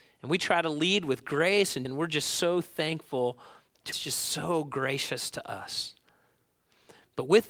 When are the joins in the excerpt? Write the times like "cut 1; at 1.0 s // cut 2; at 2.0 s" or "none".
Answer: cut 1; at 1.9 s // cut 2; at 3.9 s